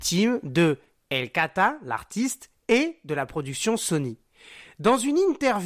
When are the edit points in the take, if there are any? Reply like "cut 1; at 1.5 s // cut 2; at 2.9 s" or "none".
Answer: none